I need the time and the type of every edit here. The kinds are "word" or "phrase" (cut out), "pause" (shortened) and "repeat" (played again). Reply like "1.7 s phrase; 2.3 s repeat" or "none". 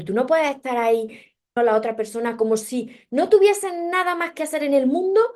1.6 s phrase